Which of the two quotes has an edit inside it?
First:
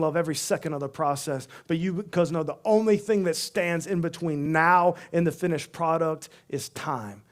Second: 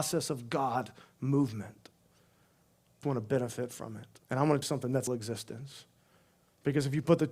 second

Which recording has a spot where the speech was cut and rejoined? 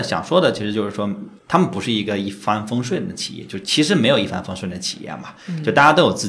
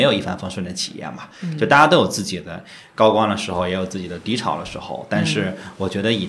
first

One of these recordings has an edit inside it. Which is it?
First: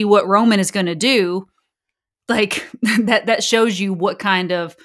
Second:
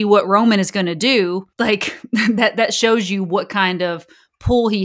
second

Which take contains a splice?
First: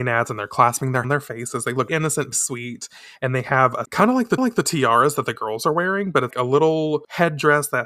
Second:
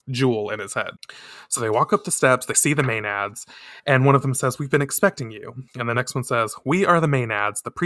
first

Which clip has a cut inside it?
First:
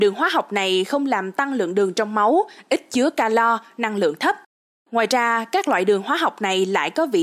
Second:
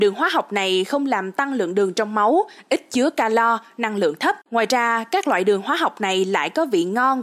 second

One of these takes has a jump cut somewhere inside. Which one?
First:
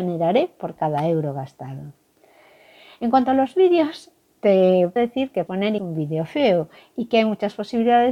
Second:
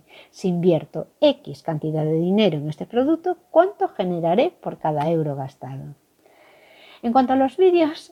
first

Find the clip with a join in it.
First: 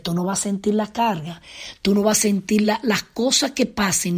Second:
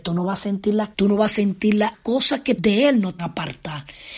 second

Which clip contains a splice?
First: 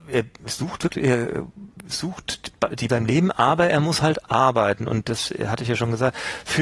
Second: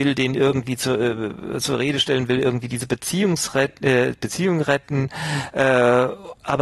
first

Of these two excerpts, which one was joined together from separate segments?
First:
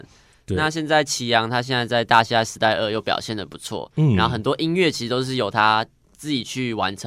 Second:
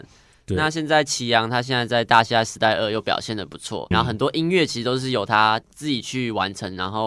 second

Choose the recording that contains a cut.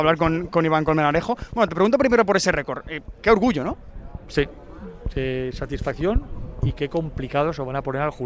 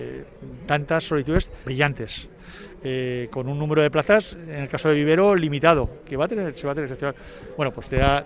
second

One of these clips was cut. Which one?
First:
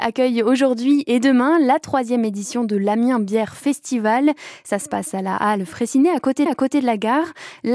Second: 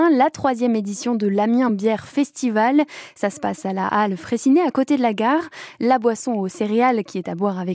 first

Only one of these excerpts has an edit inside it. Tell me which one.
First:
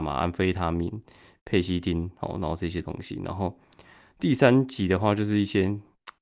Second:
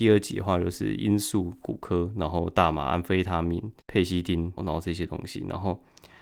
second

